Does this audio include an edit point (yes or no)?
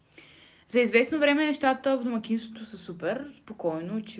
no